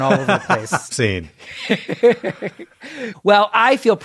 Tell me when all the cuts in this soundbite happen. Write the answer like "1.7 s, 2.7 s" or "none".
0.9 s